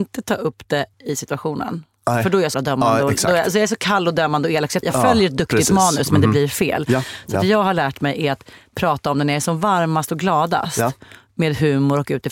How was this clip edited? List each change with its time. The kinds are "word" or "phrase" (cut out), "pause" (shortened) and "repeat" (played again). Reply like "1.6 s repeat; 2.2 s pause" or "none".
0.9 s pause; 2.5 s word; 4.8 s phrase